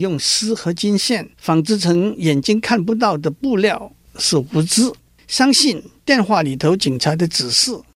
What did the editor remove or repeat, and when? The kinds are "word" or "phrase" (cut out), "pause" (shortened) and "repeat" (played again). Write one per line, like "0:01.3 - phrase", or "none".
0:01.3 - pause
0:05.0 - pause